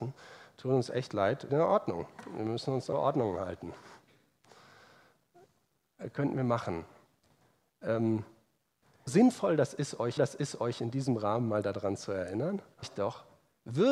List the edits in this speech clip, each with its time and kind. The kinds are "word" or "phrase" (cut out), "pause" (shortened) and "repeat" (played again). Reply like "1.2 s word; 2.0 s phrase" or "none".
1.5 s word; 2.9 s word; 9.1 s word; 10.2 s repeat; 12.8 s word